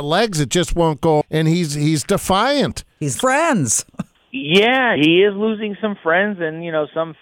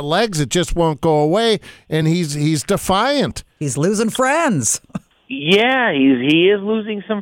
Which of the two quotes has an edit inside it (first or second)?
first